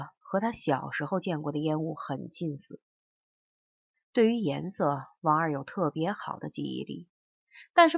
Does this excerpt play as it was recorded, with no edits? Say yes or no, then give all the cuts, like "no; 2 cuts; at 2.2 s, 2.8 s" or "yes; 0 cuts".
yes; 0 cuts